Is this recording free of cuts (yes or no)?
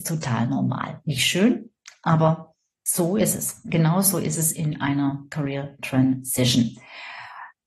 yes